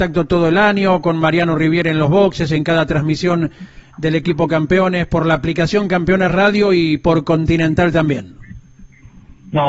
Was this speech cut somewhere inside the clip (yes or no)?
no